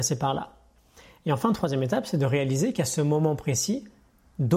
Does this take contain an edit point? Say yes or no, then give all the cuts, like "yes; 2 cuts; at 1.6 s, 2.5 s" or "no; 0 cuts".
no; 0 cuts